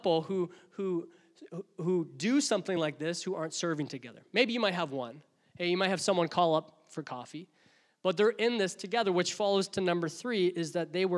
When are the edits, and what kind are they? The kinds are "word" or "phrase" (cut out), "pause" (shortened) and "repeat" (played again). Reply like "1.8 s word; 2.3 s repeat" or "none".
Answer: none